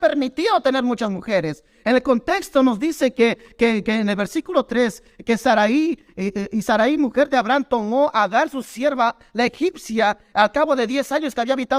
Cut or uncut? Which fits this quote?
uncut